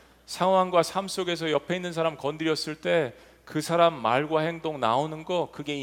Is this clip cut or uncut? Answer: uncut